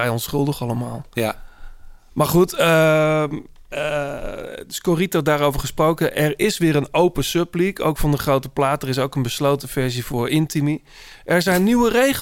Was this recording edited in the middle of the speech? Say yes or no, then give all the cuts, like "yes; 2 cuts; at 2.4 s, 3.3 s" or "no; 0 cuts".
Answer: no; 0 cuts